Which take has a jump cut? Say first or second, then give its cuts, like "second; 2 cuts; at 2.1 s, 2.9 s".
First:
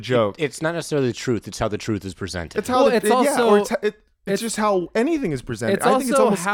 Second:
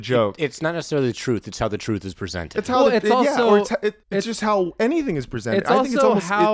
second; 1 cut; at 4.0 s